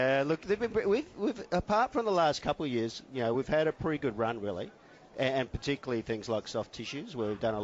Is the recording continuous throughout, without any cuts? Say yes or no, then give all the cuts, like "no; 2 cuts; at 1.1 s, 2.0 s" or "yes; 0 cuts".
yes; 0 cuts